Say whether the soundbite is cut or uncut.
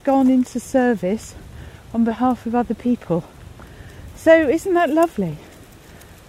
uncut